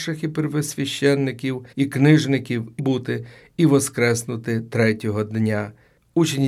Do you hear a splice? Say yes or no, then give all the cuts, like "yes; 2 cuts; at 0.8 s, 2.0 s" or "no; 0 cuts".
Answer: yes; 2 cuts; at 1.7 s, 2.8 s